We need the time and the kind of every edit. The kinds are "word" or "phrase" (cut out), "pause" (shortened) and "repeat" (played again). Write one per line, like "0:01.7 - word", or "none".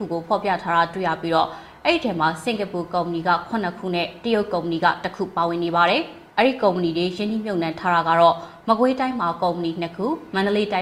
0:06.3 - pause